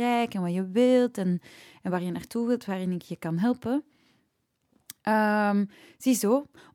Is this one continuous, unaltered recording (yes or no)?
yes